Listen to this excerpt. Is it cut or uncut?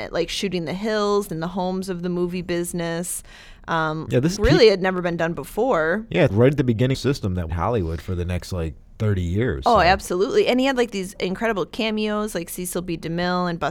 cut